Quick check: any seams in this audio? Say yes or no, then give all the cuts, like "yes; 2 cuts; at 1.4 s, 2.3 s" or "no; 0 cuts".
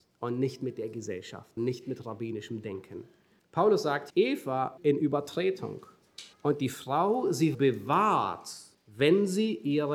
yes; 7 cuts; at 1.6 s, 3.4 s, 4.1 s, 4.8 s, 6.3 s, 7.5 s, 8.7 s